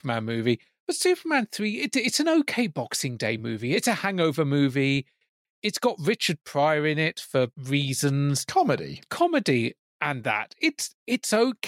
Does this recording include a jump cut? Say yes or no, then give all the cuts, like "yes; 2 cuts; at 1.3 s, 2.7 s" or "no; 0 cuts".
no; 0 cuts